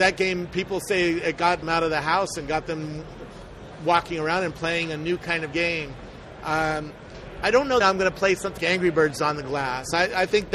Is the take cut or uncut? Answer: cut